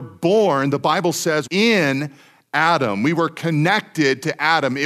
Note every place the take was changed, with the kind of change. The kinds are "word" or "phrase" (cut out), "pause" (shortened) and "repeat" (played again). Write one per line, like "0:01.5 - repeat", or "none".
0:01.5 - phrase